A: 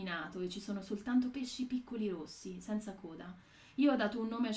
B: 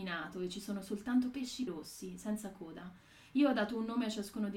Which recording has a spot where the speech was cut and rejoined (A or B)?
B